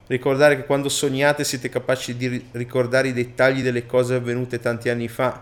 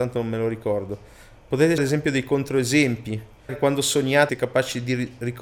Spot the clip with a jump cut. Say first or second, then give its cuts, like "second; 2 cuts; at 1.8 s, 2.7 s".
second; 3 cuts; at 1.8 s, 3.5 s, 4.3 s